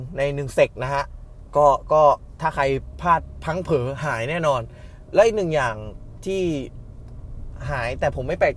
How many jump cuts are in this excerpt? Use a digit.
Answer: 0